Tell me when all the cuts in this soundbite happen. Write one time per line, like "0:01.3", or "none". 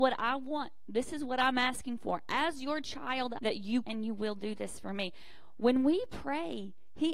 0:03.4
0:03.8